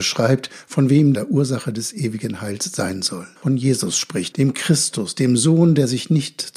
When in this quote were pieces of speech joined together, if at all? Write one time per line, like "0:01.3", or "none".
0:01.1
0:03.4
0:04.3